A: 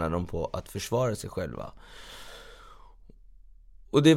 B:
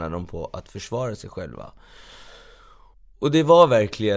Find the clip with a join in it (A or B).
B